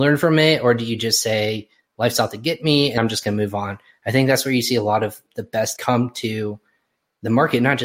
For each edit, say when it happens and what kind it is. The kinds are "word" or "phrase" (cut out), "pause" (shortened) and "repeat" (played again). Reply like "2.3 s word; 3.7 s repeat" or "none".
3.0 s word; 5.3 s word; 5.8 s word